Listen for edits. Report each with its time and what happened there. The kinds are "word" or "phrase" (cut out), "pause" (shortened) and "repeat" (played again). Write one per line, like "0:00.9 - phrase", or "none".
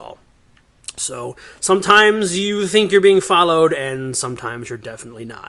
none